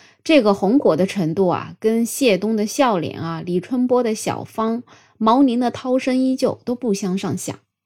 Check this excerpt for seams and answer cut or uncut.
uncut